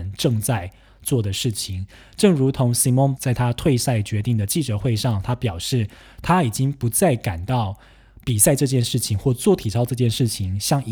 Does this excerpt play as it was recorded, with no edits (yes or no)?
no